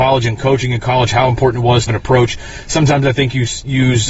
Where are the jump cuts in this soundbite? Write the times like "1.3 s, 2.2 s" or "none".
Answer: 1.9 s